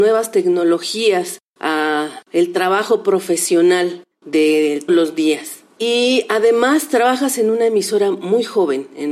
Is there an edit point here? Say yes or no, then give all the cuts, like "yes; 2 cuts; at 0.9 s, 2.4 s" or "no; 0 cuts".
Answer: yes; 1 cut; at 4.9 s